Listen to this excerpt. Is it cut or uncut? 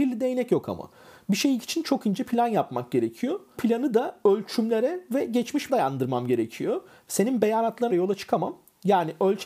cut